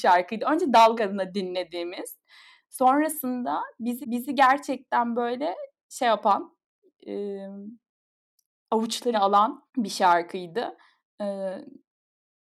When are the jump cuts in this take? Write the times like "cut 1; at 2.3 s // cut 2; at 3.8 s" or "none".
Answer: cut 1; at 1.0 s // cut 2; at 4.0 s // cut 3; at 9.1 s // cut 4; at 9.7 s